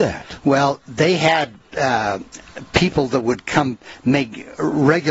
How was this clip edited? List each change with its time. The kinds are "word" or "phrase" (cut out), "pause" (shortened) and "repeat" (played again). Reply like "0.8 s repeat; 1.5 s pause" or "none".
none